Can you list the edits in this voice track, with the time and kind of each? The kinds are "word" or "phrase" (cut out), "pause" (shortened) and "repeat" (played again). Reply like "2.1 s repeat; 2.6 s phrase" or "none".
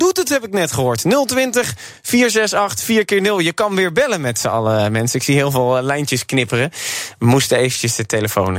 none